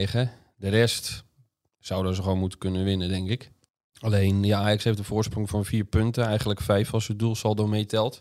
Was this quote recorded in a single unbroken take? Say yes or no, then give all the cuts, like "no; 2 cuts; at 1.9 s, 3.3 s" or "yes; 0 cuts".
no; 1 cut; at 3.7 s